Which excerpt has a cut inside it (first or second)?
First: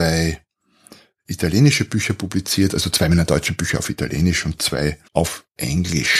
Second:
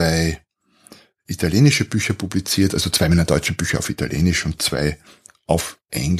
first